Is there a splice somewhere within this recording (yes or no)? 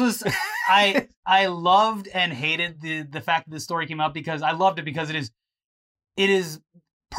no